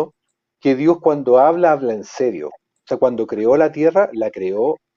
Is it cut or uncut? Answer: uncut